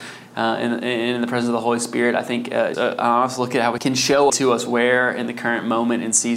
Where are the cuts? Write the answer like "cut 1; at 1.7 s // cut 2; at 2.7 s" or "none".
cut 1; at 2.7 s // cut 2; at 3.8 s // cut 3; at 4.3 s